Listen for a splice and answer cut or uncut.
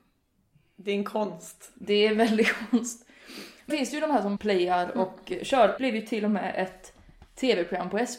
cut